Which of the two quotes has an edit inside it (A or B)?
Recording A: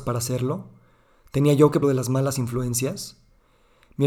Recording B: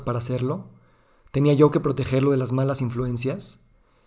A